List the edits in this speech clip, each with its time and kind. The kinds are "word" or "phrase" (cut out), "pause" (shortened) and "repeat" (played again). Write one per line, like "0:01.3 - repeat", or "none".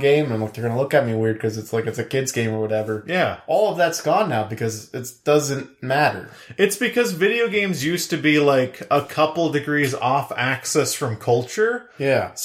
none

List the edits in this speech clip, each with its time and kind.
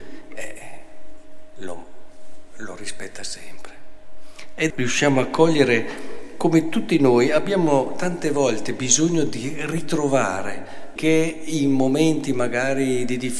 0:04.7 - phrase
0:11.0 - phrase

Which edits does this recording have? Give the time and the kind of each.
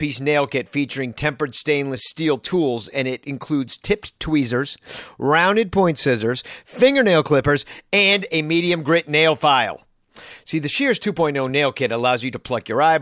none

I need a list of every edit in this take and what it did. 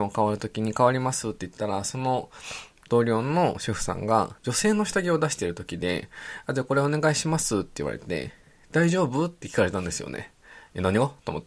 0:04.4 - pause

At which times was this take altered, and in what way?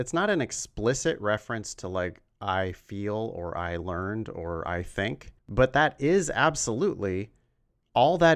0:05.4 - pause

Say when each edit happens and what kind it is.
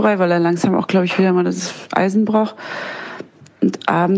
none

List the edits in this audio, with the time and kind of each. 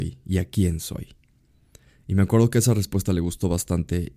none

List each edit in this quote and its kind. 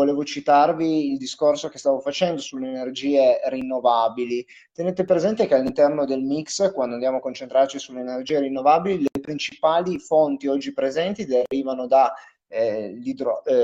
none

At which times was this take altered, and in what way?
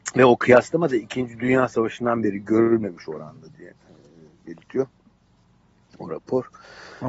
none

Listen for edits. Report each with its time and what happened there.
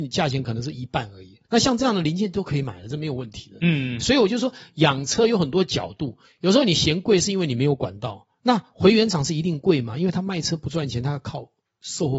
0:01.4 - pause
0:04.0 - word
0:08.3 - pause

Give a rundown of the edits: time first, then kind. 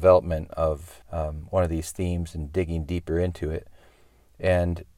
0:01.0 - pause

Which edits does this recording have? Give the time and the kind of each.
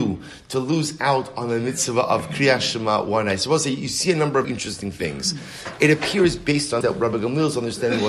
0:04.4 - word
0:06.8 - word

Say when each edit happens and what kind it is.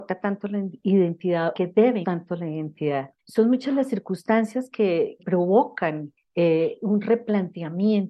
0:01.5 - phrase
0:02.0 - word
0:03.2 - pause
0:05.2 - word

